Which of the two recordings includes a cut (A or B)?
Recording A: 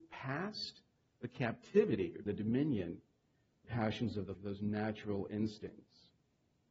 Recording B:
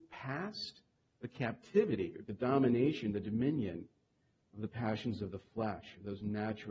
A